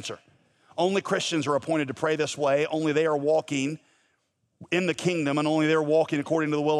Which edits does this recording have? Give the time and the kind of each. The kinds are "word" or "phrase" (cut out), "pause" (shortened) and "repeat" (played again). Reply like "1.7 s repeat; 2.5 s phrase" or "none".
none